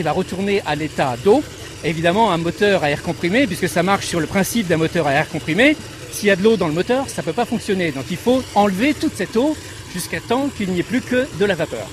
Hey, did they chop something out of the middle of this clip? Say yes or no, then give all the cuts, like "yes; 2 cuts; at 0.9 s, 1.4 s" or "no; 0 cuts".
no; 0 cuts